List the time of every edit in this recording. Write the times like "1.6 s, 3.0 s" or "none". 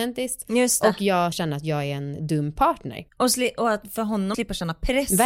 1.3 s, 3.1 s, 4.3 s